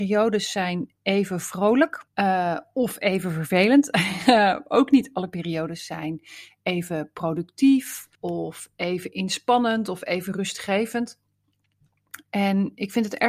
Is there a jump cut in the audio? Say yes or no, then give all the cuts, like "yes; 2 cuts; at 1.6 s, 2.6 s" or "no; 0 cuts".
yes; 2 cuts; at 2.1 s, 8.1 s